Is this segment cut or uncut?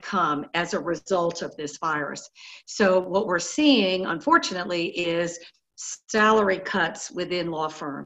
uncut